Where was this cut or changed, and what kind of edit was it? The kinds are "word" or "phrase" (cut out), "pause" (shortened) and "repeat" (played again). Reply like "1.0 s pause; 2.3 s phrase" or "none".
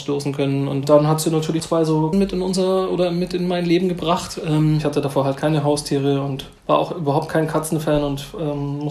1.6 s word; 2.1 s phrase; 6.6 s pause

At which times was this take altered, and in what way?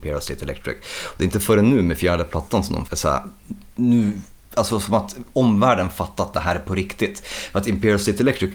2.9 s word

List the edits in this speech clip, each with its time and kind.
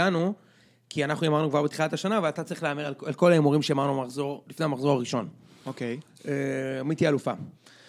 none

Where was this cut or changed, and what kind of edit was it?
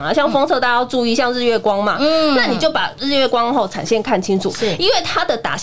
none

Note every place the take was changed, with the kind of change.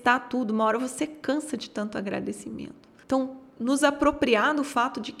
none

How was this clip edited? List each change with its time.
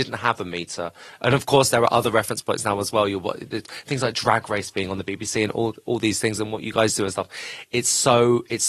none

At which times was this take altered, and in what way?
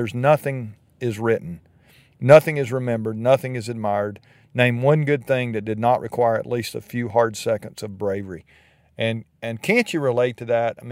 none

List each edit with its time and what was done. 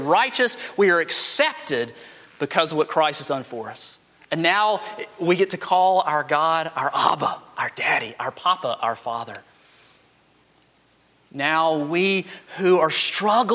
none

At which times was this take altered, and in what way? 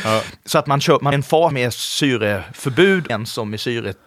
1.1 s word; 1.5 s word; 3.1 s word

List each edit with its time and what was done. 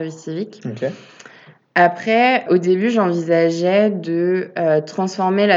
2.5 s word

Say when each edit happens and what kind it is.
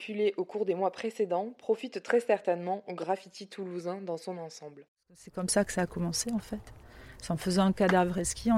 none

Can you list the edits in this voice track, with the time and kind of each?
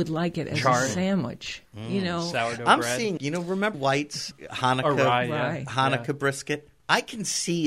1.7 s pause; 3.2 s word; 3.7 s word

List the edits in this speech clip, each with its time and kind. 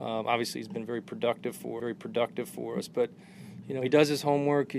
1.8 s repeat

